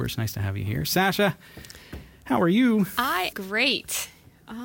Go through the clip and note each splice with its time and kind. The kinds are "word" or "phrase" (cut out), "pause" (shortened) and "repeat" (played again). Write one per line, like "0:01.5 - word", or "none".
0:03.3 - word